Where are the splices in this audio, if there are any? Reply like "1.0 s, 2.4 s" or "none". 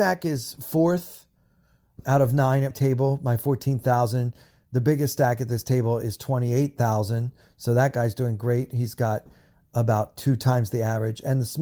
2.7 s